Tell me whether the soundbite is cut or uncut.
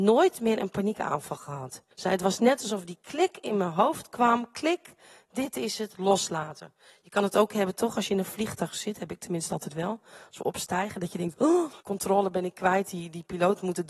cut